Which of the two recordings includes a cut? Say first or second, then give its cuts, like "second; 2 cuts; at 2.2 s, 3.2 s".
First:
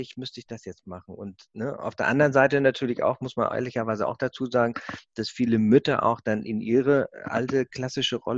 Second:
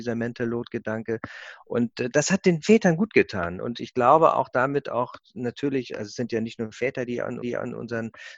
second; 1 cut; at 7.4 s